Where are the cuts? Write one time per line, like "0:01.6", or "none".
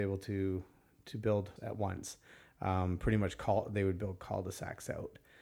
0:01.6

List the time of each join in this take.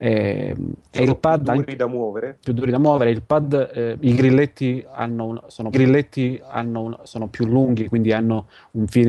0:02.4
0:04.0
0:05.7

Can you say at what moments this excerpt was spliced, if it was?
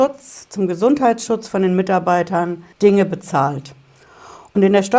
0:02.7

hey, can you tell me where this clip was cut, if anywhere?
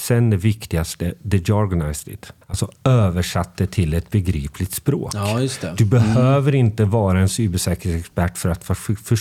0:02.4

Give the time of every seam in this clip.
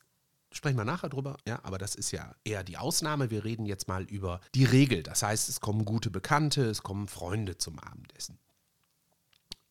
0:01.4
0:02.4
0:04.5

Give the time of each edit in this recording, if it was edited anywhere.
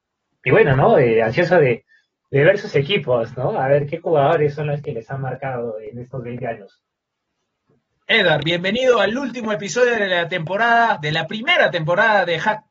none

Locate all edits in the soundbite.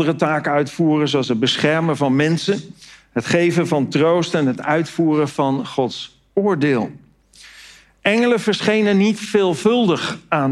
none

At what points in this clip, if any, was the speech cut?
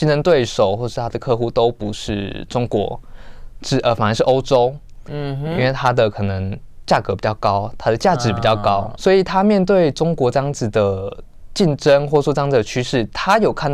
0:09.0

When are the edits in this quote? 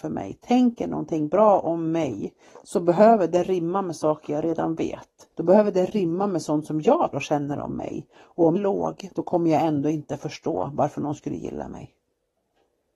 0:05.3
0:07.1
0:08.6

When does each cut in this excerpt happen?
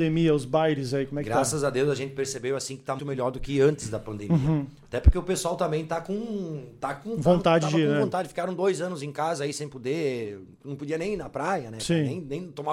0:03.0

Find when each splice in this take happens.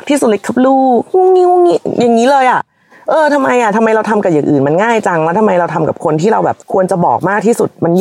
0:06.6

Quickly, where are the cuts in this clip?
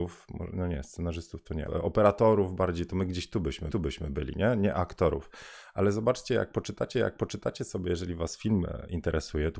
0:01.7
0:03.7
0:06.9

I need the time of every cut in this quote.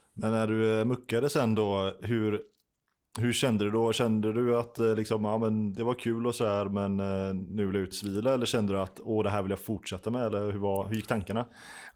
0:07.9

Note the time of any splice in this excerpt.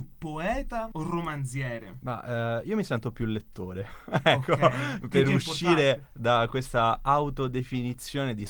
none

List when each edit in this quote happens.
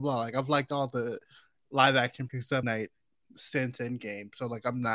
0:02.3
0:02.6

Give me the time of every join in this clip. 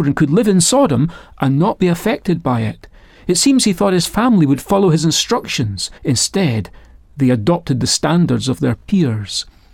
0:06.0

